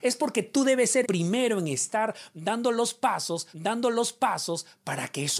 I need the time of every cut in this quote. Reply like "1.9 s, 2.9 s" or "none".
1.0 s, 3.5 s

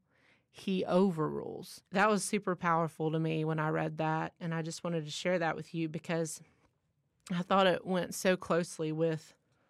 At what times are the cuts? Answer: 1.9 s

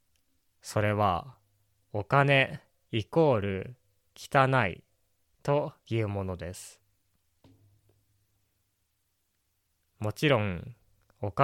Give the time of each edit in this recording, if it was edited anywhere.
none

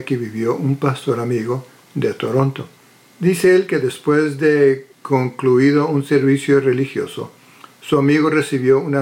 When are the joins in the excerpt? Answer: 2.8 s, 4.9 s

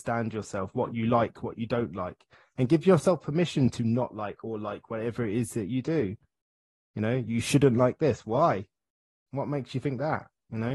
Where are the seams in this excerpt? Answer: none

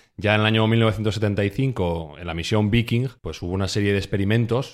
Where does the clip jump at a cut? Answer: 3.2 s

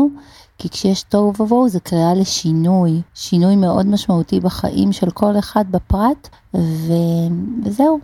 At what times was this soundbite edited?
3.1 s, 6.3 s

